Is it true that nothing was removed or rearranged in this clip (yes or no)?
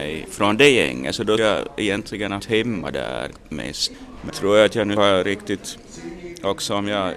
no